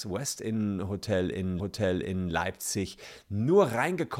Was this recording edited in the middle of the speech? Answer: yes; 1 cut; at 1.6 s

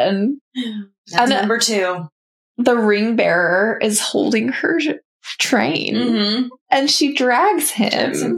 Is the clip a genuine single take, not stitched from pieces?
no; 1 cut; at 1.3 s

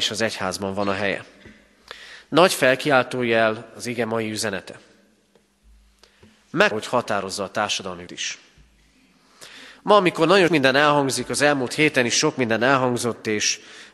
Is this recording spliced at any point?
yes; 3 cuts; at 6.7 s, 8.1 s, 10.5 s

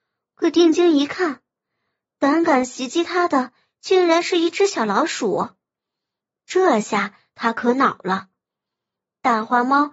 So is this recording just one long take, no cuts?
yes; 0 cuts

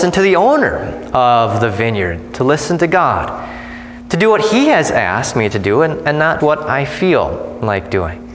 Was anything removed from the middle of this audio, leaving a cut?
yes; 1 cut; at 6.4 s

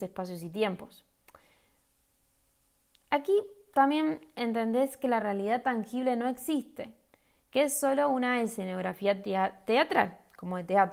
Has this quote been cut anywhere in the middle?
no; 0 cuts

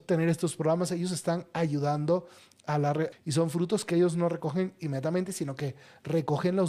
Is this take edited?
yes; 1 cut; at 3.1 s

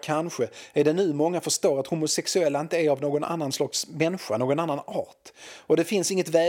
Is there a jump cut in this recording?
no; 0 cuts

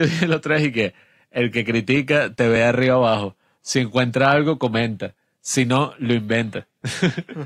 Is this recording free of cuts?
yes; 0 cuts

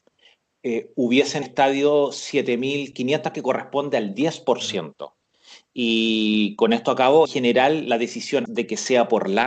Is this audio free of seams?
no; 4 cuts; at 1.4 s, 3.3 s, 7.2 s, 8.4 s

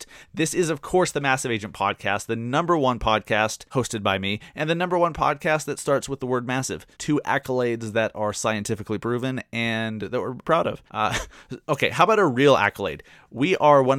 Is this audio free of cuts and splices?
no; 4 cuts; at 3.7 s, 6.9 s, 10.4 s, 10.9 s

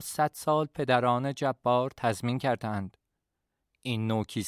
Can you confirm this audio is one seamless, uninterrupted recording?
yes; 0 cuts

